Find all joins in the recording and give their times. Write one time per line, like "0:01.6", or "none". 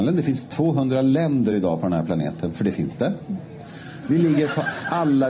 none